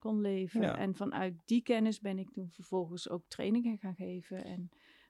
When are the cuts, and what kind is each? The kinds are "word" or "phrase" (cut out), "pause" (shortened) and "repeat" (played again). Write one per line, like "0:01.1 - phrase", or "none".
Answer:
none